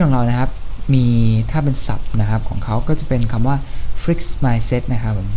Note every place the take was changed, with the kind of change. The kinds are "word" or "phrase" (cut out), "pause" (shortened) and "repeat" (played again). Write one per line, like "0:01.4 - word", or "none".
none